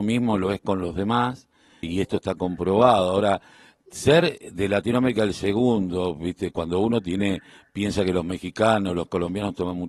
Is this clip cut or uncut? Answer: cut